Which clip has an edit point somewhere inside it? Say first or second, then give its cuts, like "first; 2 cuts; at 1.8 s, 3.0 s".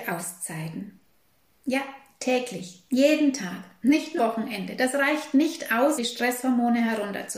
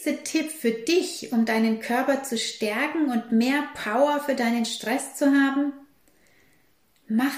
first; 2 cuts; at 4.2 s, 6.0 s